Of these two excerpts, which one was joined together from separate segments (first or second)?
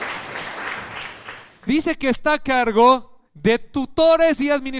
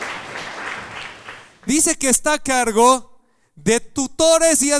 first